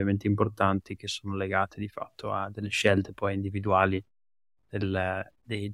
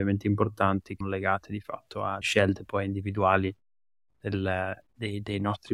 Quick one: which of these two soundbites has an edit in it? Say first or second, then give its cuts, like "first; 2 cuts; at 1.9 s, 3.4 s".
second; 2 cuts; at 1.0 s, 2.2 s